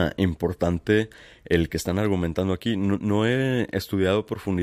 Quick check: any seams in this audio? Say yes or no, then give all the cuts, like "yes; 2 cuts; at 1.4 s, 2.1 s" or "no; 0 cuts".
yes; 1 cut; at 1.7 s